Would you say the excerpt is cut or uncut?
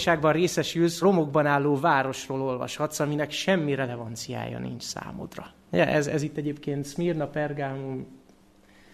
cut